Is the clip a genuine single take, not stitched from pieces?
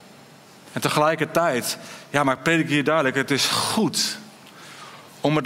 yes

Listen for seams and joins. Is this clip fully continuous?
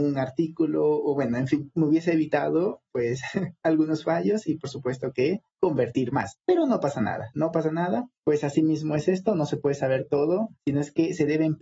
no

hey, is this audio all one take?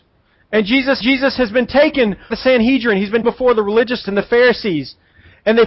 no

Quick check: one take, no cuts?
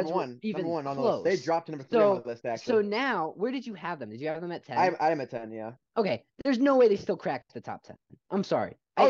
yes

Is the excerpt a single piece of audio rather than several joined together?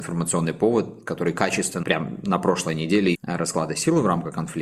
no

